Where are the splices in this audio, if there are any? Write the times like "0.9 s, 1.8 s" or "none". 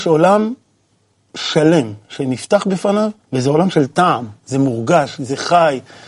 3.2 s